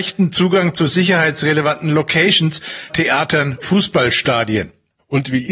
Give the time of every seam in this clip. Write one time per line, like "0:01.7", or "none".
0:02.9
0:03.6

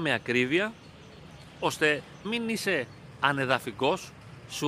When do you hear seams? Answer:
0:02.2

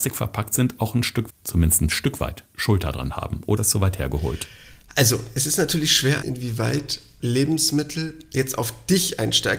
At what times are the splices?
0:01.3
0:03.6
0:06.2
0:07.2

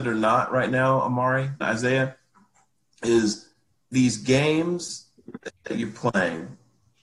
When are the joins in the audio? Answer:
0:01.6
0:03.8

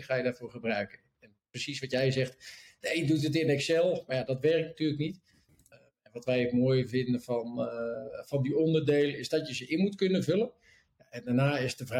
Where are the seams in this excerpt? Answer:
none

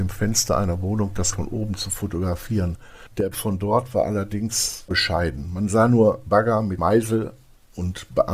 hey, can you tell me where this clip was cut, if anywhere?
0:01.3
0:03.3
0:04.9
0:06.3
0:06.8

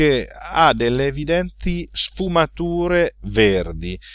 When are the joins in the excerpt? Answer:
none

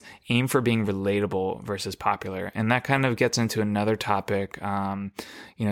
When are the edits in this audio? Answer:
none

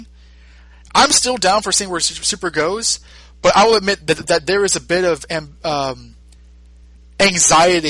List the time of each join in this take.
none

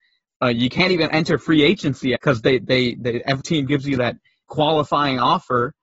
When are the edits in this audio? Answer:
0:02.2
0:03.4
0:04.4

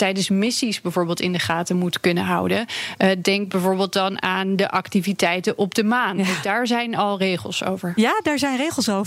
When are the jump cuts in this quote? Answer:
none

